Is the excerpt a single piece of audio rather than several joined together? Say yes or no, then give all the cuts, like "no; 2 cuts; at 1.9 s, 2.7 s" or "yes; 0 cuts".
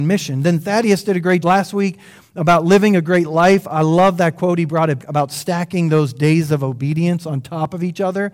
no; 2 cuts; at 1.4 s, 5.0 s